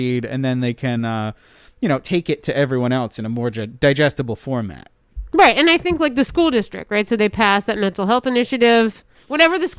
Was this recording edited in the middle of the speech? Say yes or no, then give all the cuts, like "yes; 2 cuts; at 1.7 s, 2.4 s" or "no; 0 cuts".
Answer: no; 0 cuts